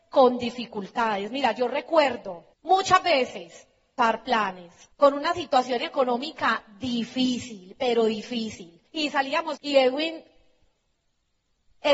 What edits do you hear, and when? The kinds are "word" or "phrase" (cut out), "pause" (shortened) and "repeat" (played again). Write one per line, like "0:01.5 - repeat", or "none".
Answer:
0:02.5 - pause
0:04.0 - phrase
0:04.9 - pause
0:08.9 - pause
0:09.6 - phrase